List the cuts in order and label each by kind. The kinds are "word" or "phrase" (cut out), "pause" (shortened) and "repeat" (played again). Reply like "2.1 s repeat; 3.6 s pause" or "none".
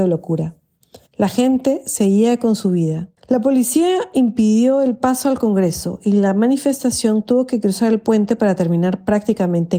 1.1 s pause; 3.2 s pause

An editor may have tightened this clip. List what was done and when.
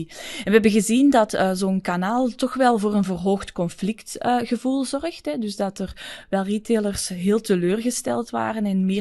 none

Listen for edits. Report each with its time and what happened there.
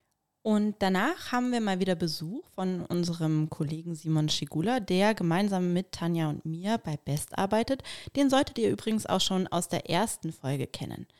none

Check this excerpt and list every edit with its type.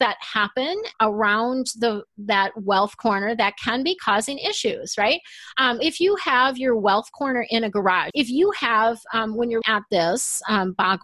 0.9 s word; 5.8 s word; 8.1 s word; 9.6 s word

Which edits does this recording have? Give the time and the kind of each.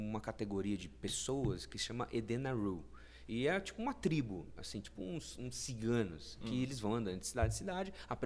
none

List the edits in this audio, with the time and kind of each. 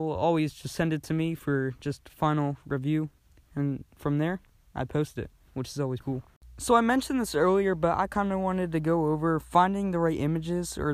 6.0 s word

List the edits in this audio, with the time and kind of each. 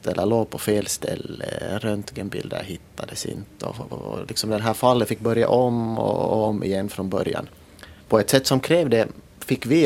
8.0 s pause

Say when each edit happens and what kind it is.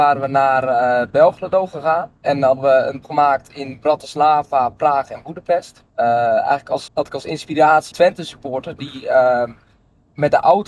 2.2 s pause; 3.0 s word; 5.9 s pause; 6.9 s word; 7.9 s word

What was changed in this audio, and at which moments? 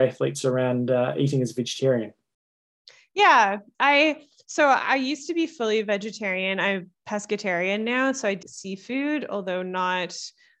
8.4 s word

